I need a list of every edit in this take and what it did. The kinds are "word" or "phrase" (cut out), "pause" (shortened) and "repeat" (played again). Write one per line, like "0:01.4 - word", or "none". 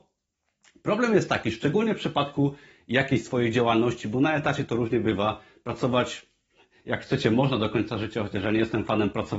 none